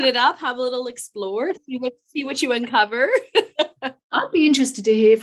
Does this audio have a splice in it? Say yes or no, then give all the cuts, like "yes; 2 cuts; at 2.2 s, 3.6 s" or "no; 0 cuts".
no; 0 cuts